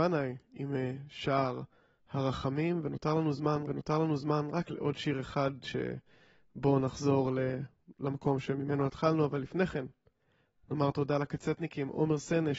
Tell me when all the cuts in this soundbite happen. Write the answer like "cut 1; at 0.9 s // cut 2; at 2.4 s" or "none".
cut 1; at 3.7 s